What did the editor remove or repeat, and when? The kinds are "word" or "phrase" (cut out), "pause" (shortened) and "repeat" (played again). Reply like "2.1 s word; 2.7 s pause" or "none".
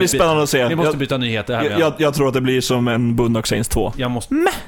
none